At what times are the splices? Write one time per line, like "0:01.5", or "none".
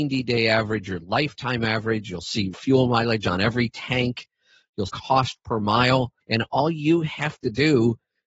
0:02.5
0:04.9
0:06.2